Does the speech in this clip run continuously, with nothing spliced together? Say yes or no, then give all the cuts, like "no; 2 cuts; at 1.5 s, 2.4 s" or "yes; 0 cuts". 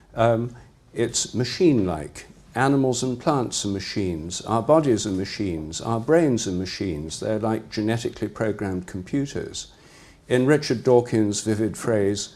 yes; 0 cuts